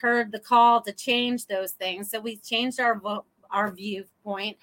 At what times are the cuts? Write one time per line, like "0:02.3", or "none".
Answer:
none